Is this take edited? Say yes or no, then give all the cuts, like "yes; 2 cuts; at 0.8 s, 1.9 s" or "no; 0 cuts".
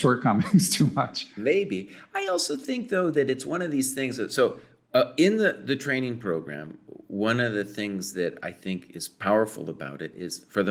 no; 0 cuts